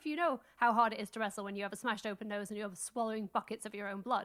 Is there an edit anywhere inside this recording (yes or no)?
no